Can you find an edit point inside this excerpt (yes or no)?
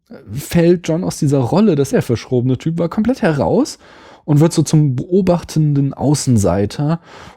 yes